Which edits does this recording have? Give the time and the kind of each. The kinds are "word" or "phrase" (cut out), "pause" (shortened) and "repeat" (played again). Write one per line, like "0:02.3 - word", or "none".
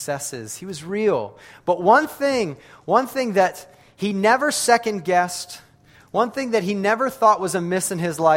none